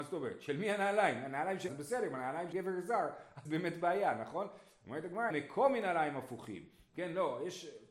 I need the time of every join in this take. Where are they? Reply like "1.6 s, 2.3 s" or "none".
1.7 s, 2.5 s, 3.4 s, 5.3 s